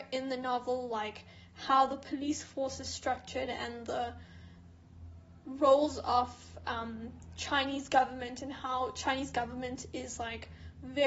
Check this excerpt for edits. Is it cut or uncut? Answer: uncut